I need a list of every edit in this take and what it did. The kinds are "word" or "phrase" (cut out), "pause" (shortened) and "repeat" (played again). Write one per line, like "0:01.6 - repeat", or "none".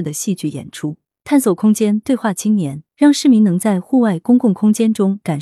0:02.9 - pause